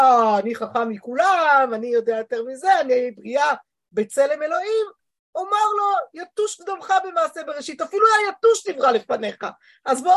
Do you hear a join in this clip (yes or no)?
no